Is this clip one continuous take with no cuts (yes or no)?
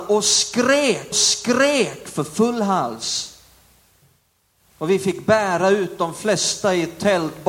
no